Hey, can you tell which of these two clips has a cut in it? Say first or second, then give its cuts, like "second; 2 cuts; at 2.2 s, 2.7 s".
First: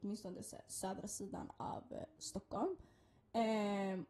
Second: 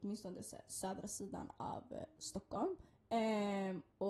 second; 1 cut; at 2.9 s